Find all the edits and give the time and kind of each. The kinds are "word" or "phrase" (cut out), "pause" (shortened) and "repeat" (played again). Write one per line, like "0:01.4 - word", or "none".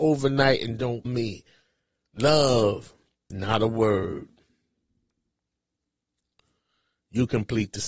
0:01.1 - word
0:03.3 - word

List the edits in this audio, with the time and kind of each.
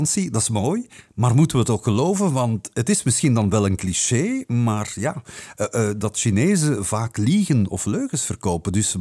none

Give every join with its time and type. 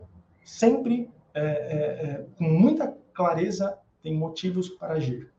none

